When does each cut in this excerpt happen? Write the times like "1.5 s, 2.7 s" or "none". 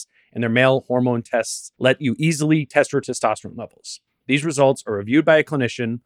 1.7 s

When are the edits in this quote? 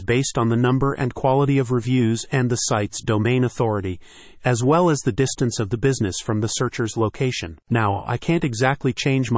none

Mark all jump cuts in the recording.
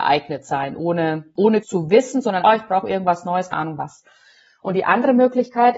1.6 s, 2.4 s, 3.5 s

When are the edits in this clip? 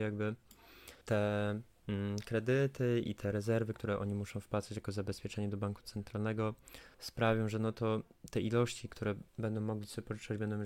1.0 s, 6.9 s, 9.3 s

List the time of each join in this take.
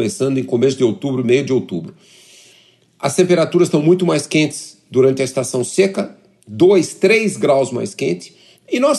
none

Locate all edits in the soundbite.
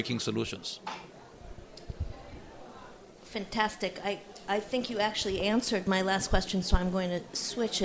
none

